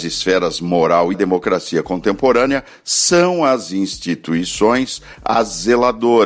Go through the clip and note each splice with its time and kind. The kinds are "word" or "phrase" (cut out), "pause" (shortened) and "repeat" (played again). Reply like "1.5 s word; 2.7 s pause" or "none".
1.1 s phrase